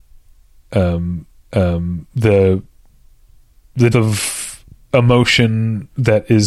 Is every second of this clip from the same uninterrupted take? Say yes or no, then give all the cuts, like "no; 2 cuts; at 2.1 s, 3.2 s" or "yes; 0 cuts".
no; 2 cuts; at 1.3 s, 3.9 s